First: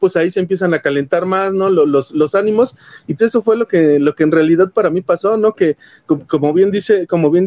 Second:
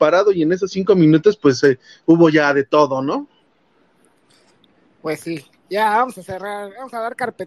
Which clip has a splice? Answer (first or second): first